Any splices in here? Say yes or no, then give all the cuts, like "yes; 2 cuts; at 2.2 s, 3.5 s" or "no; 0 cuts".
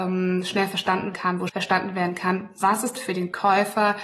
yes; 3 cuts; at 1.1 s, 1.5 s, 3.0 s